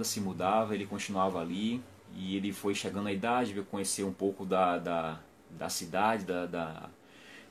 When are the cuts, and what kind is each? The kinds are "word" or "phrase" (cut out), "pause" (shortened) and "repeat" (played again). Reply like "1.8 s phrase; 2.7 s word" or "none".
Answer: none